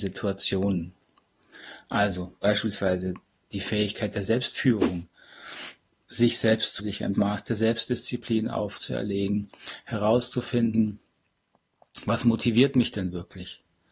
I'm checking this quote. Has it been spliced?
yes; 2 cuts; at 6.8 s, 7.1 s

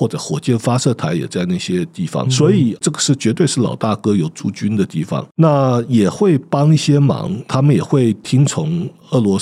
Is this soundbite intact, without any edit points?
no; 1 cut; at 2.2 s

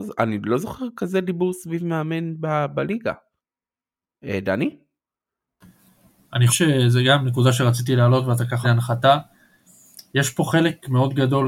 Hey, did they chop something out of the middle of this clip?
yes; 3 cuts; at 3.4 s, 6.5 s, 8.6 s

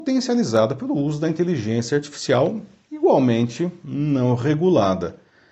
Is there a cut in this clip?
no; 0 cuts

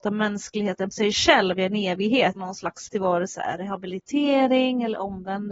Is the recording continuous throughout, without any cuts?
no; 4 cuts; at 0.9 s, 2.4 s, 2.9 s, 3.3 s

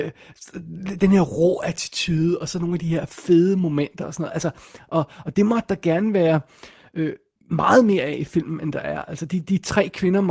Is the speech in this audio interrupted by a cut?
no; 0 cuts

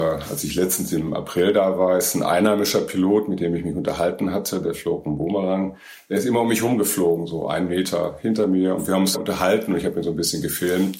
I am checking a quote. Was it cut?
yes; 1 cut; at 9.1 s

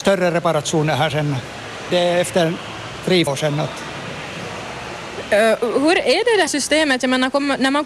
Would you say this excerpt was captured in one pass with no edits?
no; 3 cuts; at 1.9 s, 3.3 s, 6.5 s

